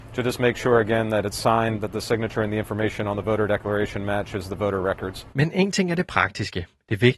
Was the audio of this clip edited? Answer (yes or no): no